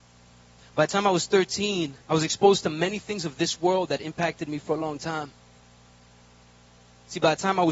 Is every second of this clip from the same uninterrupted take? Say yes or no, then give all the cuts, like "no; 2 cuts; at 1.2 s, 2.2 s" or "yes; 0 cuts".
no; 1 cut; at 2.0 s